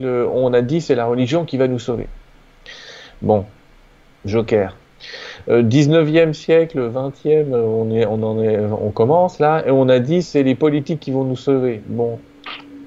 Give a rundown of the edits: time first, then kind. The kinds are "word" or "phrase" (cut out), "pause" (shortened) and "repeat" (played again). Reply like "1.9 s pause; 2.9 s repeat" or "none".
none